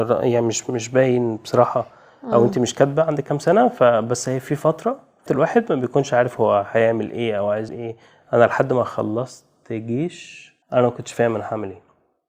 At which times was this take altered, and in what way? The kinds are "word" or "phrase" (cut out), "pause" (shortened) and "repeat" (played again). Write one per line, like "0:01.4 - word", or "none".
0:05.3 - word
0:07.7 - word
0:10.6 - pause